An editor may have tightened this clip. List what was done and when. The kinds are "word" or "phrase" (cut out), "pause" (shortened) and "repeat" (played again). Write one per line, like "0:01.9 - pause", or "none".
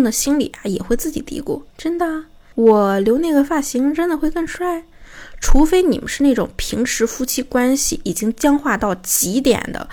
0:01.7 - pause